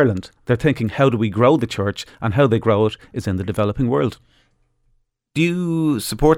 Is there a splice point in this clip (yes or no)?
no